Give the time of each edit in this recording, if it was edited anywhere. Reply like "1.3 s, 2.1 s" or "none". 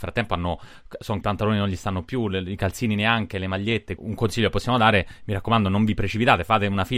1.2 s, 4.0 s